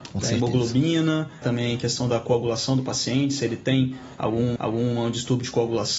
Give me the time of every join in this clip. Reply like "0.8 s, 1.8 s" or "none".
1.4 s, 4.6 s